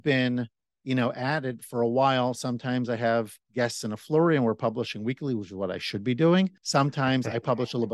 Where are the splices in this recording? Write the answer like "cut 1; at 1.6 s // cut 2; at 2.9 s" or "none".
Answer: cut 1; at 3.4 s // cut 2; at 6.6 s

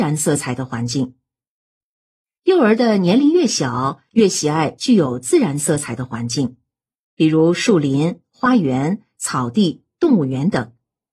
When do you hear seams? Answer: none

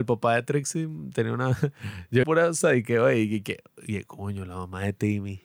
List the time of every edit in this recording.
cut 1; at 2.2 s

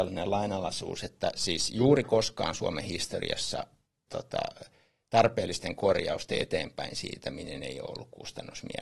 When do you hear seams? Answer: cut 1; at 4.1 s

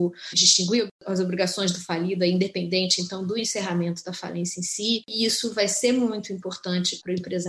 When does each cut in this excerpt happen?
none

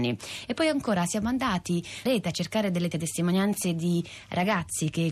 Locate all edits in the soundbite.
cut 1; at 2.1 s // cut 2; at 2.9 s

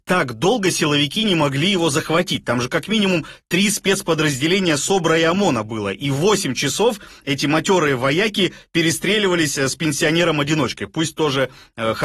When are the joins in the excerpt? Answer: none

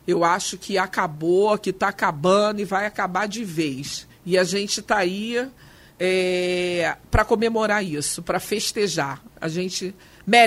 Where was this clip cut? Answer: cut 1; at 4.1 s

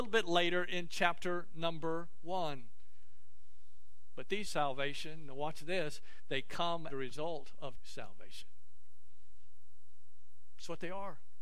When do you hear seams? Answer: cut 1; at 4.4 s // cut 2; at 6.9 s // cut 3; at 7.7 s

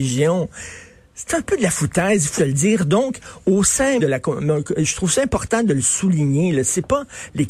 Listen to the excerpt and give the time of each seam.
cut 1; at 2.4 s // cut 2; at 4.0 s

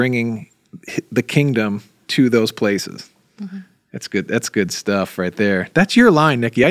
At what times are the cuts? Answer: none

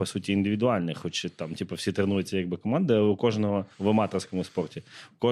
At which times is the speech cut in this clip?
cut 1; at 3.7 s

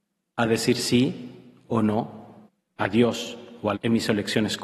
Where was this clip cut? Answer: cut 1; at 2.5 s // cut 2; at 3.7 s

